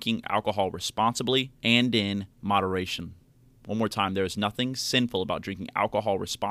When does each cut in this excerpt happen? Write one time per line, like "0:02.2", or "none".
0:01.6
0:02.3